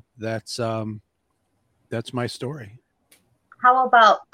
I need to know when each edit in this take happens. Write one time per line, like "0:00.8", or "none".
none